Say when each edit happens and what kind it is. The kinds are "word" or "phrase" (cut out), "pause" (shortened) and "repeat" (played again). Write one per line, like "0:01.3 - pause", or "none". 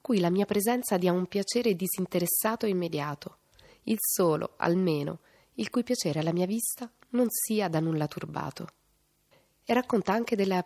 none

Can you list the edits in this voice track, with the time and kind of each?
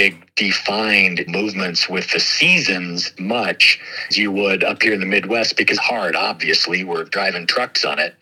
0:01.3 - word
0:03.2 - word
0:04.1 - word
0:05.8 - phrase

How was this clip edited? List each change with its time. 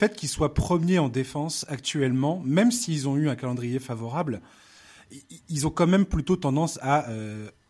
none

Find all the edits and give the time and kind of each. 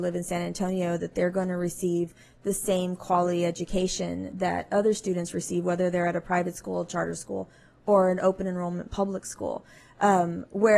none

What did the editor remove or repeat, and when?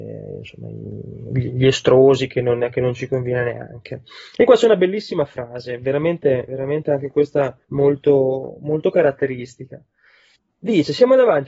0:07.6 - pause
0:10.4 - pause

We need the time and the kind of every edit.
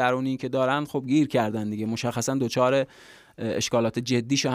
none

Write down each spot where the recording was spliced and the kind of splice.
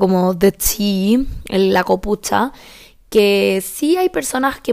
none

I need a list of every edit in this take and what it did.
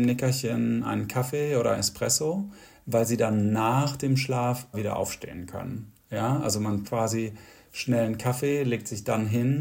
0:01.7 - word
0:04.7 - word
0:06.8 - word

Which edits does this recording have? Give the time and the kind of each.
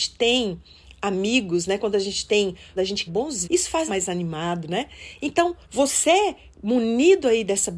0:02.8 - phrase
0:03.1 - word
0:03.4 - word
0:03.9 - phrase
0:05.6 - pause

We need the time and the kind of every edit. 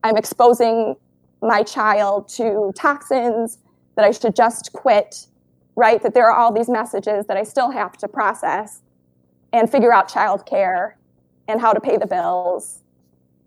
none

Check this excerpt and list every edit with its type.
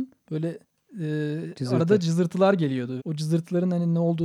0:03.0 - word

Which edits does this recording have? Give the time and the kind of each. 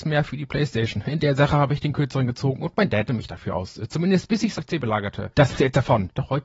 0:03.1 - word
0:04.6 - word
0:05.5 - word

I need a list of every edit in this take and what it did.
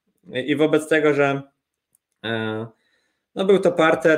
none

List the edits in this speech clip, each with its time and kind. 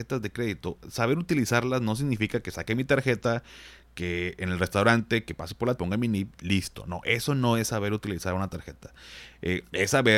0:05.8 - word
0:06.4 - word

